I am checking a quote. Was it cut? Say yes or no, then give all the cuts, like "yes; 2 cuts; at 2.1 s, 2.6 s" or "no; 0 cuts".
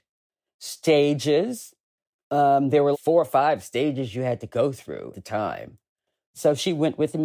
yes; 2 cuts; at 2.9 s, 5.1 s